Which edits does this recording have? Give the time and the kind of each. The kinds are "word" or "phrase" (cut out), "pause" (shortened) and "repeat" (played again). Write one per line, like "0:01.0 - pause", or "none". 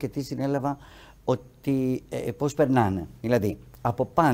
0:03.2 - pause